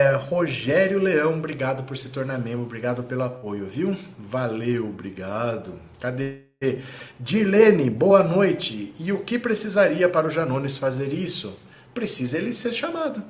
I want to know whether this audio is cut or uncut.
uncut